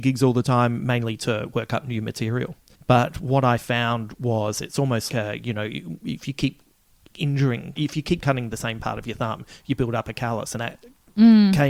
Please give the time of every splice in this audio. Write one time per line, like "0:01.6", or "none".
0:02.7
0:05.1
0:07.8
0:10.5